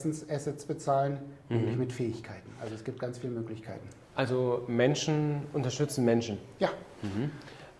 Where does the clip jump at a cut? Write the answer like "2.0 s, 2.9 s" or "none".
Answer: 4.0 s